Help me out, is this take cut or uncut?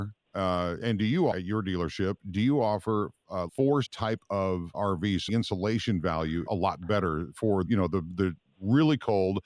cut